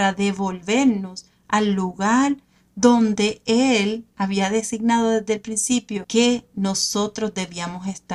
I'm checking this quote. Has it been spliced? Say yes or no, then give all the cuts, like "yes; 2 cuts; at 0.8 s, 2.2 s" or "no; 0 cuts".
no; 0 cuts